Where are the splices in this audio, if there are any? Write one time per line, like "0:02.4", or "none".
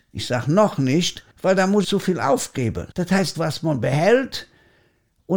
0:01.3
0:01.8
0:02.9
0:03.3